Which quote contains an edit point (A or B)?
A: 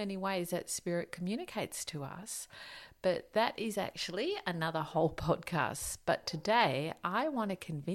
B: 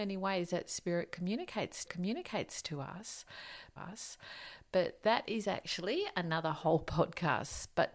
B